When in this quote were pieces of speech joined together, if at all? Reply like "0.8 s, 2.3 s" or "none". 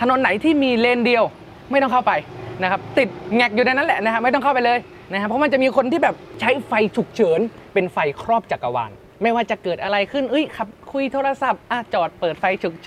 7.7 s